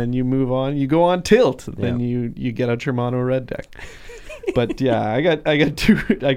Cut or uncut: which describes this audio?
uncut